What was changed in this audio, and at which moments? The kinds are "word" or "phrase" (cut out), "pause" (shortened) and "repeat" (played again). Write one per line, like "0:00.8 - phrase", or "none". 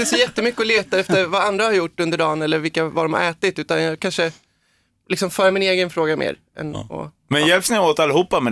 none